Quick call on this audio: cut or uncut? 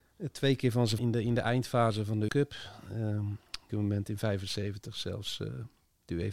cut